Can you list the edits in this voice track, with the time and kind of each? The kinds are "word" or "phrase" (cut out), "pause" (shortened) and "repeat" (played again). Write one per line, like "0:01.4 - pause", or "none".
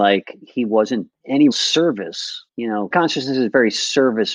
0:01.1 - word
0:01.5 - word
0:02.5 - pause
0:02.9 - word